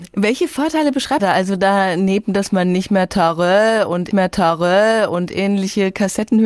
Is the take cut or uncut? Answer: cut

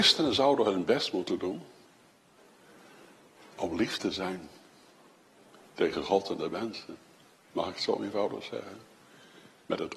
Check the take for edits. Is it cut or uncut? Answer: uncut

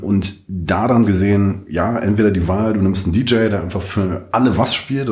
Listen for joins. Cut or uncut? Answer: cut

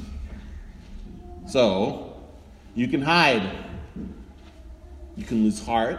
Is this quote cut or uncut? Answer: uncut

